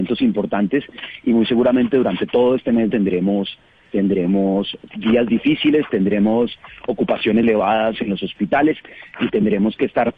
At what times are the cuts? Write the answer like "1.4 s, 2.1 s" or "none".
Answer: 2.9 s, 4.9 s, 7.4 s